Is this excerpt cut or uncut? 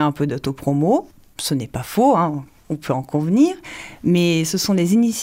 uncut